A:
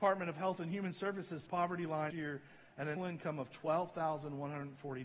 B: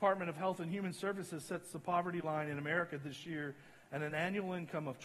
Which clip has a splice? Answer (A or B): A